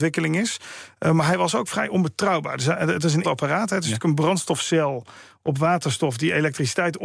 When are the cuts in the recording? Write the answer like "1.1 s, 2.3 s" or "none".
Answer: 3.2 s